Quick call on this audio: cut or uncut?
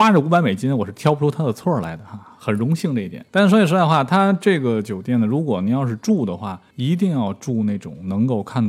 cut